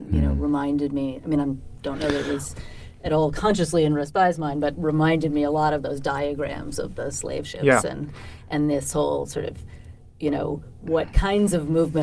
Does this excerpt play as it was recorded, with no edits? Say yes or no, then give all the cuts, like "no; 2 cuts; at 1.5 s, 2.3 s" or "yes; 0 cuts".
yes; 0 cuts